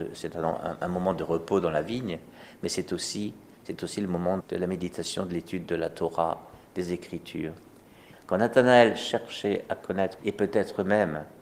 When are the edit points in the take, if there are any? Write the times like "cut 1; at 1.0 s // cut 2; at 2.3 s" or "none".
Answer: cut 1; at 4.4 s // cut 2; at 10.2 s